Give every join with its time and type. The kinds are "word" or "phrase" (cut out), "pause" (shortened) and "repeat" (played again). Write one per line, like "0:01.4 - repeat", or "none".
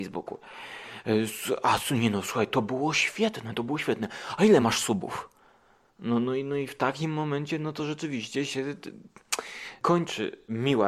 none

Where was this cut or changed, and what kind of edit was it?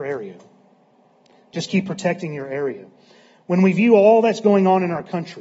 none

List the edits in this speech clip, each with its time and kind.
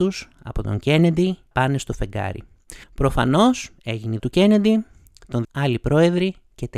0:01.5 - word
0:02.8 - pause
0:04.2 - word
0:05.4 - word

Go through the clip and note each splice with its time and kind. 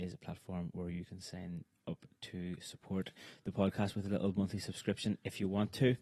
none

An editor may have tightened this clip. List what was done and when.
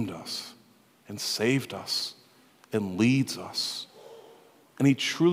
none

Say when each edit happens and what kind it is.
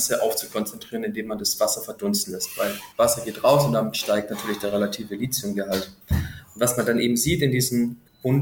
0:02.9 - pause
0:06.0 - pause

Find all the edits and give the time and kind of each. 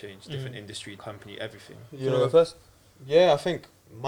0:01.0 - word

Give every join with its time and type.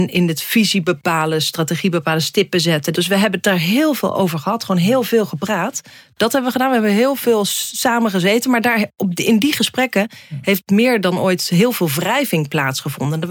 none

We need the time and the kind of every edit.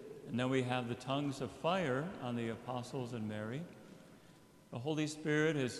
none

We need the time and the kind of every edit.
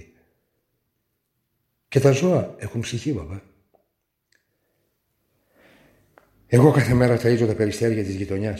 none

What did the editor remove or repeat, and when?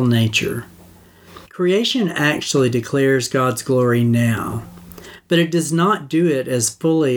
0:01.5 - pause

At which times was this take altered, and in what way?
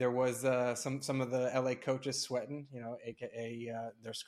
none

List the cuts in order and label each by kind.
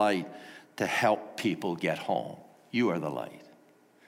none

